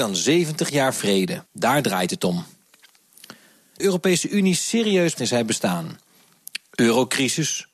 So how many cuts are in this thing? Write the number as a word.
three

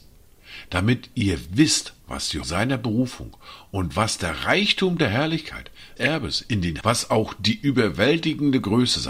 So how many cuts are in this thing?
four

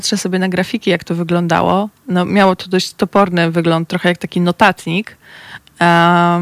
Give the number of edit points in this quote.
one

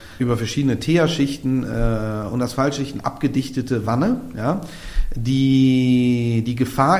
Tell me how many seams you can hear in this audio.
zero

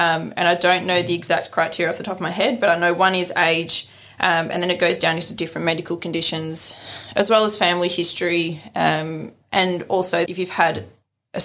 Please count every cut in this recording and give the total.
one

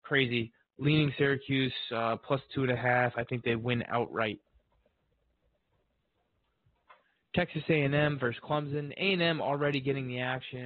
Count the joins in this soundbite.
zero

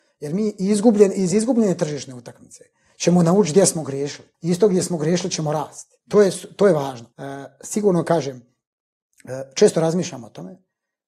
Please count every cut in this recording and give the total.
three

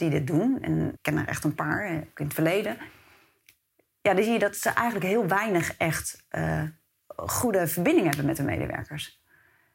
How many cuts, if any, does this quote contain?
one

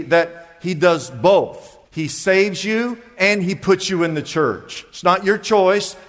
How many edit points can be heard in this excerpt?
one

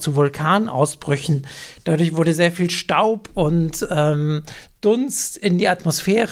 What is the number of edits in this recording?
zero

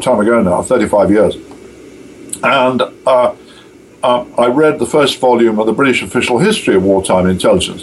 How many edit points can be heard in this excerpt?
zero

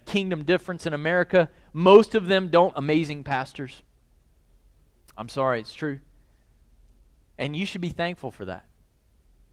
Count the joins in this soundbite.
one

